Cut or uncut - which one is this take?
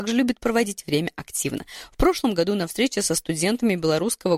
uncut